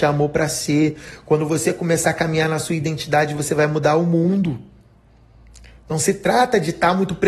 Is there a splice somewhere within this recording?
no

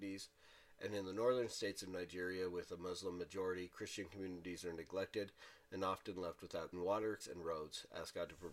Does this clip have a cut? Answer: yes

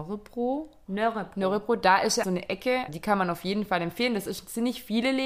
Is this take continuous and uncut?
no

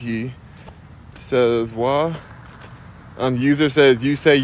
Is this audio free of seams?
yes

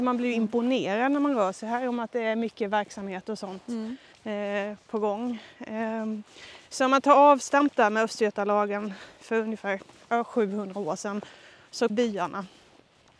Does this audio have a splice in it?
yes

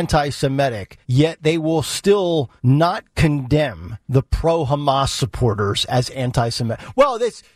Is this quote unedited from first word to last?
no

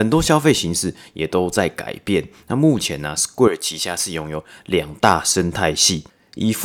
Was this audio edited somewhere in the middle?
no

